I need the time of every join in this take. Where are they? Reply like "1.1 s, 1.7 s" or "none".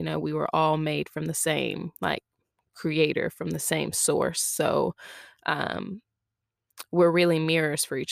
2.0 s